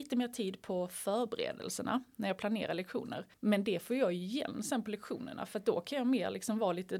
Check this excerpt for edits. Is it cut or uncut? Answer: cut